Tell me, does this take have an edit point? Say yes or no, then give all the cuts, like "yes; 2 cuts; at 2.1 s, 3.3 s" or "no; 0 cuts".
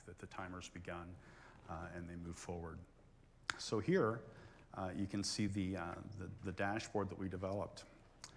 no; 0 cuts